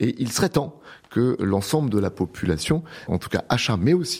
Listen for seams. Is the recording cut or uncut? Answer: cut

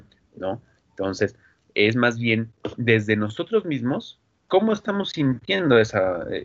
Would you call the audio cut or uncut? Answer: uncut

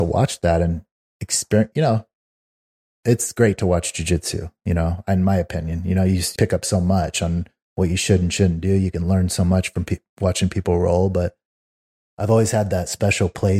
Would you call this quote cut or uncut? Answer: cut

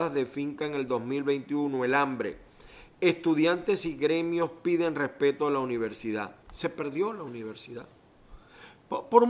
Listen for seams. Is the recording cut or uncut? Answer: cut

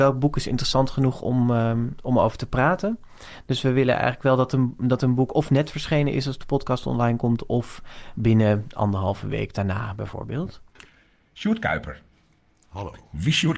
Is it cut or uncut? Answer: uncut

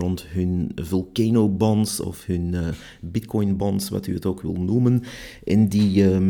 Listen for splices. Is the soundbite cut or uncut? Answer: uncut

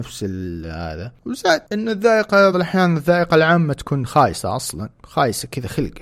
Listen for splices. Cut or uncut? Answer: cut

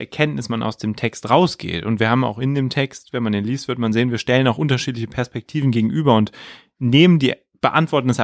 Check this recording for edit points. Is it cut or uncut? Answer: uncut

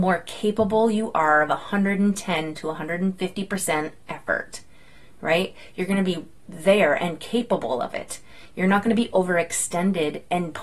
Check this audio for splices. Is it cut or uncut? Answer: uncut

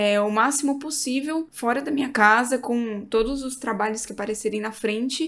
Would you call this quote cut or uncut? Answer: uncut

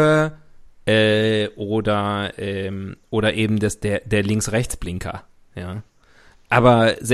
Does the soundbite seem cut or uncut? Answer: uncut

